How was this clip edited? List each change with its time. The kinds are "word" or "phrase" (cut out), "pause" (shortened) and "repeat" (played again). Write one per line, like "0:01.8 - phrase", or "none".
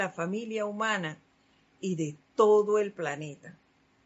none